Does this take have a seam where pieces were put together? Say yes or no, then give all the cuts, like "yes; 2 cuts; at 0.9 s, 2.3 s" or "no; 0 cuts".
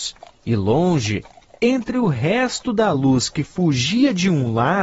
no; 0 cuts